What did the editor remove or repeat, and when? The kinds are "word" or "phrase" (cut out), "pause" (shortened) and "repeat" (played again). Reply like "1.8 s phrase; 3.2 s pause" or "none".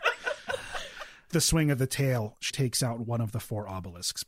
1.3 s word; 2.5 s word